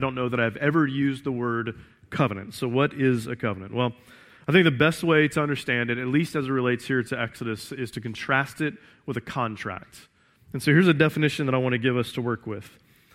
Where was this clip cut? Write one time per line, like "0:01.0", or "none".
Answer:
none

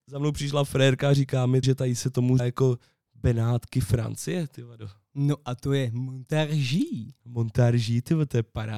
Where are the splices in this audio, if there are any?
0:01.6
0:02.4

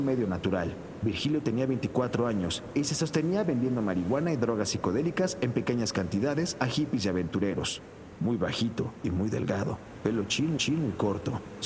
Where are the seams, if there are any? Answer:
0:10.6

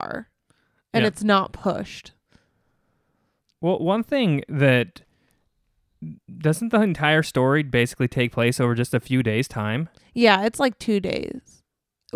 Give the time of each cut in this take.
none

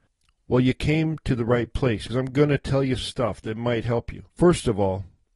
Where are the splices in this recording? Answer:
0:02.1
0:03.0
0:04.3

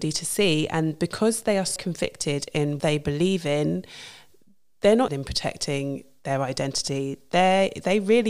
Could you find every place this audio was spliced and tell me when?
0:01.8
0:02.8
0:05.1

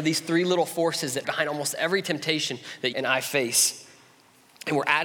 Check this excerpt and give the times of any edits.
0:01.2
0:02.9

